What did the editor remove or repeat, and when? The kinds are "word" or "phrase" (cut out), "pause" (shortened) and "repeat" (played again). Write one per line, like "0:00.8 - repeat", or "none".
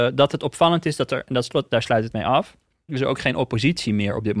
0:02.9 - word